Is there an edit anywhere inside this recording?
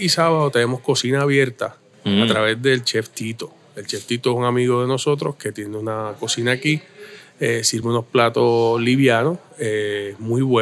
no; 0 cuts

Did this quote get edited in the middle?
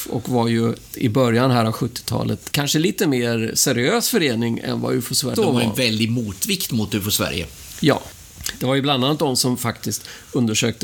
yes; 3 cuts; at 0.9 s, 2.5 s, 5.3 s

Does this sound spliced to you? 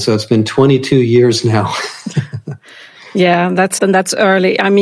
yes; 1 cut; at 3.8 s

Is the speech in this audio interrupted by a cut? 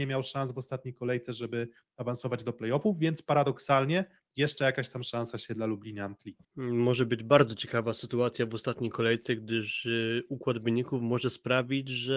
yes; 1 cut; at 6.4 s

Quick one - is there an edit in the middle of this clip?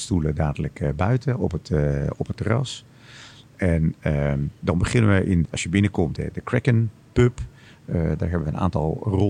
yes; 2 cuts; at 5.4 s, 6.2 s

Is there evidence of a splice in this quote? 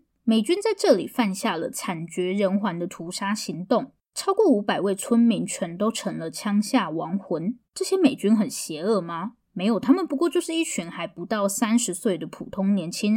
yes; 1 cut; at 7.7 s

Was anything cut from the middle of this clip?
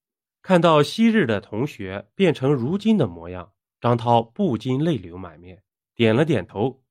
no; 0 cuts

